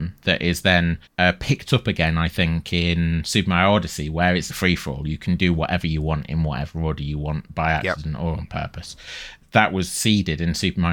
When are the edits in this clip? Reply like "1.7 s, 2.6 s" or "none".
1.1 s, 4.5 s

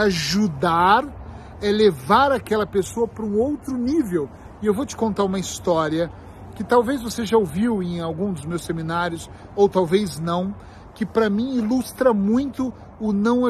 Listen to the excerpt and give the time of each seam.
none

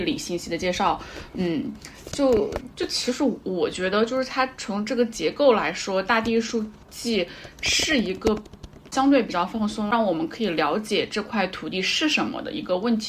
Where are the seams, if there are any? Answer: 6.8 s

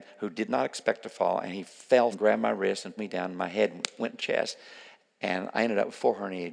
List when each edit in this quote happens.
2.1 s, 3.0 s, 4.2 s

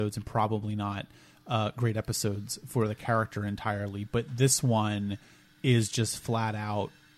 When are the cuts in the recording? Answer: none

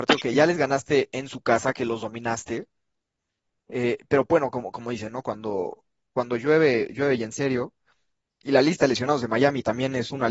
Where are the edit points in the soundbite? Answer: none

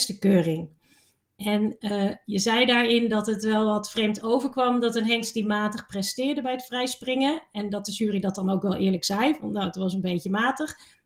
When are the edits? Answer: none

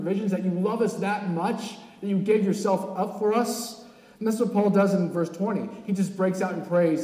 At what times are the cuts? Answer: none

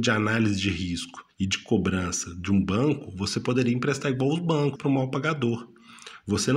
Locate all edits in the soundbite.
1.3 s, 4.8 s

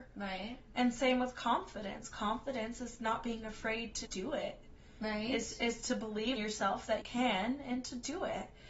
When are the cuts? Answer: 4.1 s, 6.4 s, 7.0 s

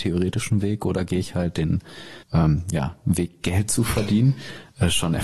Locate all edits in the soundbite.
2.2 s

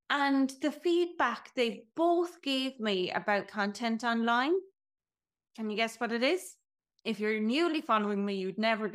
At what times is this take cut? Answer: 3.4 s, 6.8 s

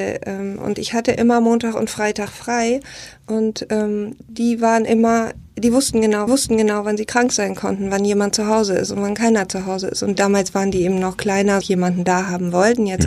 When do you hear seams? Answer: 6.3 s, 11.6 s

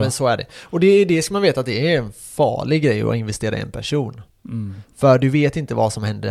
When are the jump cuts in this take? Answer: none

